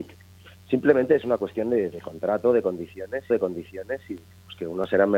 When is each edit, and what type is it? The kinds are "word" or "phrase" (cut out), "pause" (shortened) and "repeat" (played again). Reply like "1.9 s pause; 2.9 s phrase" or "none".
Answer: 3.3 s repeat